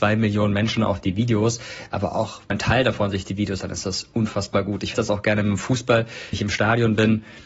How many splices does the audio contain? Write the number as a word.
four